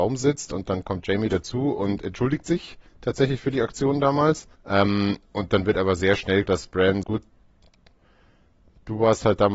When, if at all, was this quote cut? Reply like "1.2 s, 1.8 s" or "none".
4.5 s, 6.4 s, 7.0 s